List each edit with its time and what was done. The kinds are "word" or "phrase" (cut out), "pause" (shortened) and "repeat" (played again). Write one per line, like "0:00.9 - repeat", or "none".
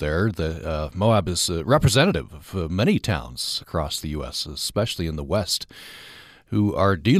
0:03.6 - word